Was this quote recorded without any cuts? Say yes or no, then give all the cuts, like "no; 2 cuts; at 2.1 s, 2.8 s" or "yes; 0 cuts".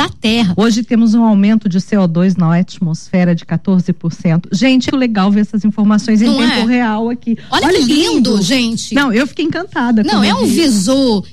no; 1 cut; at 4.9 s